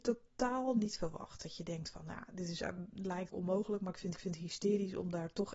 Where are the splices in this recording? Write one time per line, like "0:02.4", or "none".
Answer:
0:03.3
0:04.2